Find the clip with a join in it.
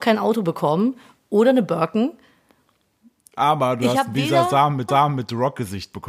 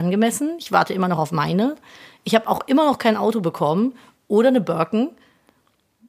first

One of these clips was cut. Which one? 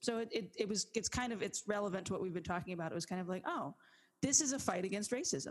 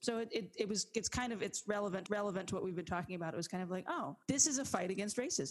second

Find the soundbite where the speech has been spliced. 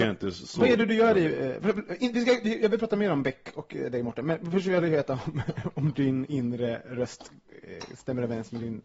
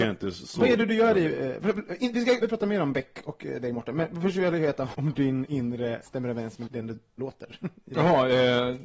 second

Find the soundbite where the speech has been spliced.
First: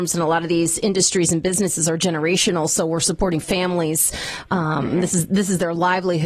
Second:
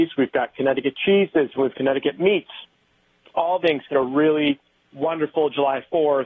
second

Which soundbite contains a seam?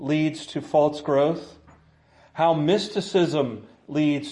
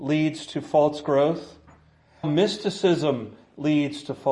second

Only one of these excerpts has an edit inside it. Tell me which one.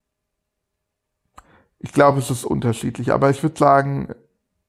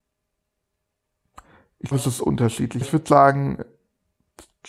second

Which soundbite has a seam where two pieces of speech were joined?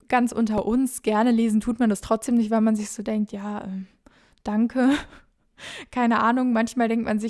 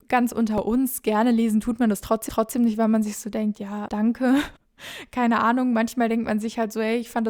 second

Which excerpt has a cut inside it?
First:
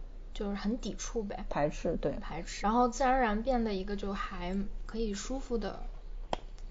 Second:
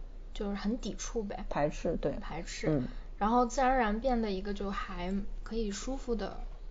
first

